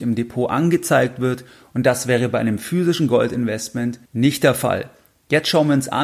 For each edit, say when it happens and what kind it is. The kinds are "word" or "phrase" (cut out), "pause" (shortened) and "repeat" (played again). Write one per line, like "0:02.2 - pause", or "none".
0:04.1 - pause